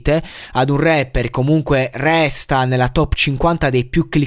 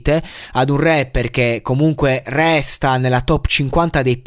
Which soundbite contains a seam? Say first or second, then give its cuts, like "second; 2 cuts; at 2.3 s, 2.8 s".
first; 1 cut; at 1.3 s